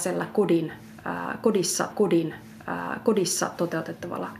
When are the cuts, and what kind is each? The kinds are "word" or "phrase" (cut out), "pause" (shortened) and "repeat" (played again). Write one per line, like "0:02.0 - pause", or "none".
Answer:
0:01.9 - repeat

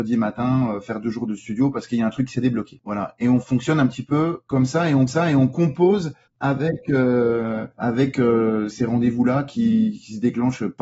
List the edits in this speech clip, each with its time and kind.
0:05.1 - repeat
0:07.7 - pause
0:08.7 - word

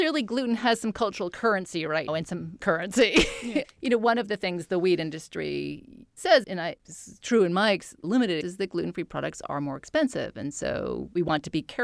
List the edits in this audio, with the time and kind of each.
0:02.1 - word
0:02.6 - word
0:03.6 - word
0:06.4 - word
0:08.0 - word
0:08.4 - word

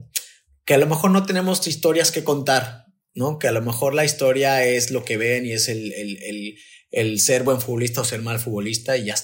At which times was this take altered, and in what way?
none

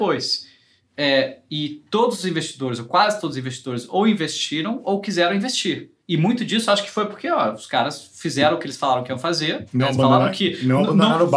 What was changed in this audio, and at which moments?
0:06.0 - pause

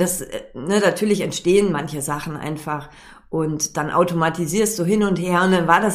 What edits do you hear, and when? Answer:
none

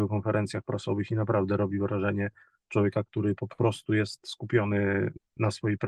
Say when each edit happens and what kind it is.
none

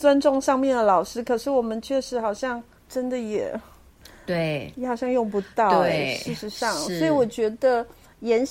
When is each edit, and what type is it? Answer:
none

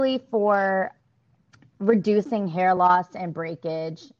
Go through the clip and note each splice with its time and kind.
none

